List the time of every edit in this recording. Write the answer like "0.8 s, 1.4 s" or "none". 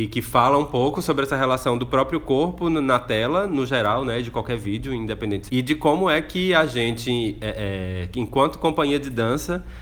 5.5 s